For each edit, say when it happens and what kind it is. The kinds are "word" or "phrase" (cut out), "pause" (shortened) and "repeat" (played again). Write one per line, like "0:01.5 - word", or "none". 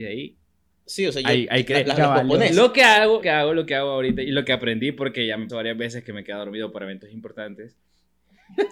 0:03.2 - word
0:05.5 - word